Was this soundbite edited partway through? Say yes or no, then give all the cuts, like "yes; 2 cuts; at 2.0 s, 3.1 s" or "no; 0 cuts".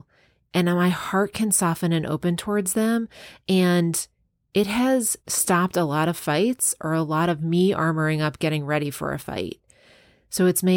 yes; 1 cut; at 5.2 s